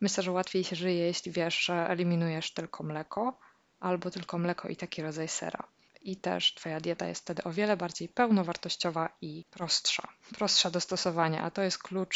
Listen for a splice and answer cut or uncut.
uncut